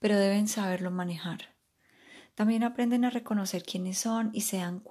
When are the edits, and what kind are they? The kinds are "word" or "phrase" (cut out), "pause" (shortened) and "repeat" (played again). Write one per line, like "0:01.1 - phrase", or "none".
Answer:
none

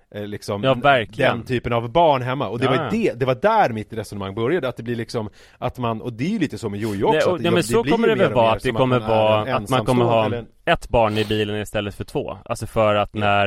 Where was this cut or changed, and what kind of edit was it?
none

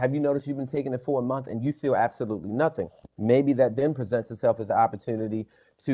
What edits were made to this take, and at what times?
none

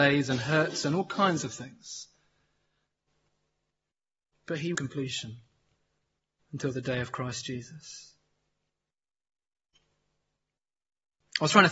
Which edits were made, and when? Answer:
0:04.7 - phrase

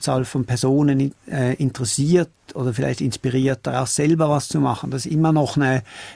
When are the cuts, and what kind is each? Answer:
none

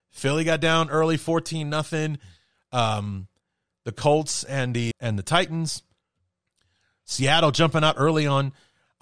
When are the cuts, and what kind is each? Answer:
0:04.9 - word

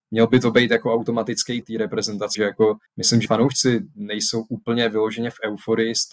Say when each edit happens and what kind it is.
0:01.6 - word
0:02.3 - word
0:02.9 - pause
0:03.3 - word

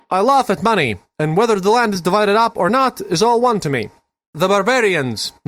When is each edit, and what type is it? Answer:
none

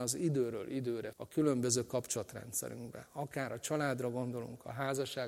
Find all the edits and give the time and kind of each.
0:01.1 - word

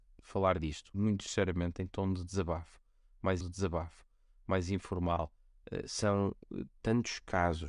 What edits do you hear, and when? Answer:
0:00.9 - word
0:03.4 - repeat

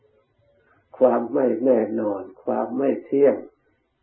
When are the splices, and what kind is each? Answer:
none

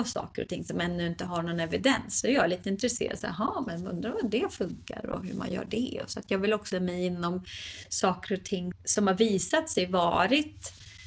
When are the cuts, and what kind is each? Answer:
0:06.7 - word
0:08.7 - word

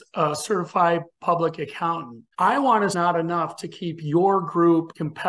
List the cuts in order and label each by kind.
0:02.9 - phrase

